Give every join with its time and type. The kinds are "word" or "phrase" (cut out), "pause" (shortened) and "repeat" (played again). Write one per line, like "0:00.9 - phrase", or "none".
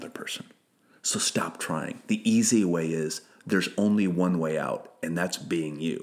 none